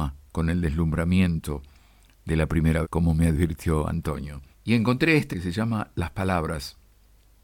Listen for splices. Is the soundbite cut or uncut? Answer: cut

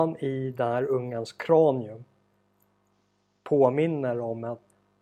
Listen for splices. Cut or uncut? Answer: uncut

